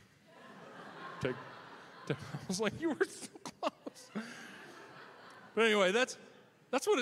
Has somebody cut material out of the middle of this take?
no; 0 cuts

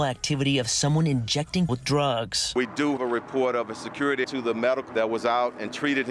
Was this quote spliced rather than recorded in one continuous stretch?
yes; 4 cuts; at 1.7 s, 3.0 s, 4.2 s, 4.9 s

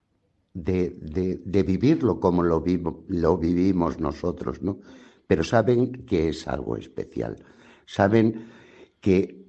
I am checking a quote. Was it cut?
no; 0 cuts

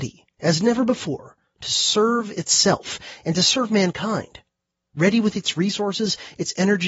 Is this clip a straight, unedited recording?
yes; 0 cuts

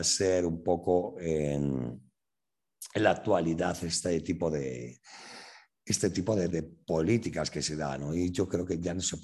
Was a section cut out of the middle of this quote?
yes; 1 cut; at 6.5 s

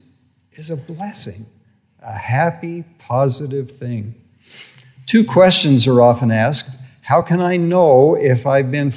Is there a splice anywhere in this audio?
no; 0 cuts

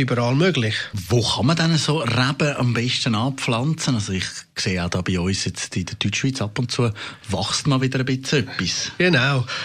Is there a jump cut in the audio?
no; 0 cuts

